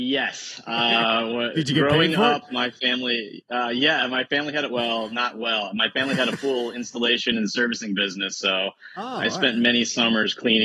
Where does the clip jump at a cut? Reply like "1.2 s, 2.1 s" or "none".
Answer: none